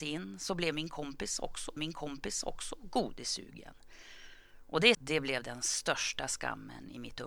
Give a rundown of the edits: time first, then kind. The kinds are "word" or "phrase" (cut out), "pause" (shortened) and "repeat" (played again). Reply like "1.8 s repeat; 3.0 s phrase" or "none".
1.8 s repeat; 4.9 s word